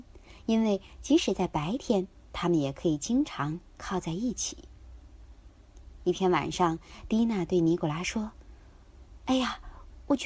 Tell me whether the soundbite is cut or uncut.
uncut